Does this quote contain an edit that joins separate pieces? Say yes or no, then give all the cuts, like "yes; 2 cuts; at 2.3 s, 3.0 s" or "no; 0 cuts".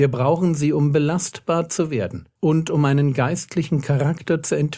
yes; 1 cut; at 2.4 s